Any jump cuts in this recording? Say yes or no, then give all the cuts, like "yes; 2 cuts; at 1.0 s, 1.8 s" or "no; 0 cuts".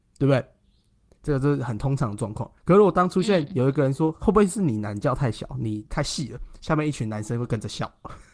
yes; 1 cut; at 2.6 s